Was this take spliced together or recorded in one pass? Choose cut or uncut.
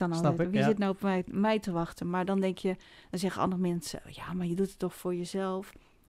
uncut